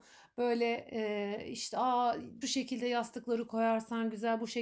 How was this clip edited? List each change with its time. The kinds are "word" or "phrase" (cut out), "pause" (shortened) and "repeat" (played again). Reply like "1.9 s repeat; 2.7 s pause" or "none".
2.4 s word